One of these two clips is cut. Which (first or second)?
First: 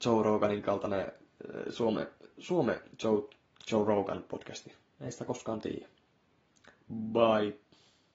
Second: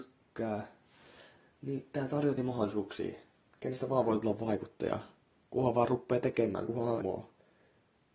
second